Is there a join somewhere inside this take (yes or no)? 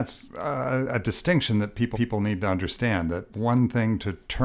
yes